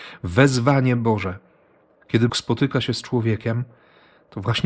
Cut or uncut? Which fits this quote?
cut